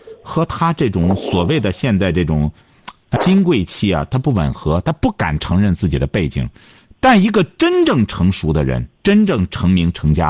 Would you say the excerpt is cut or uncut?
cut